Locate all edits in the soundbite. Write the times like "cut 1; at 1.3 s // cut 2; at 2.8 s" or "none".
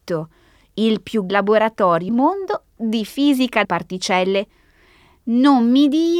cut 1; at 1.3 s // cut 2; at 2.1 s // cut 3; at 3.6 s